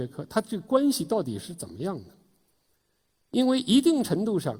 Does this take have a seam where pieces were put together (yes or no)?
no